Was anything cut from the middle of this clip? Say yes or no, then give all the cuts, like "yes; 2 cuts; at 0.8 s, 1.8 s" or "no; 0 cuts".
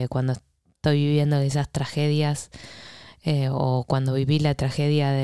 no; 0 cuts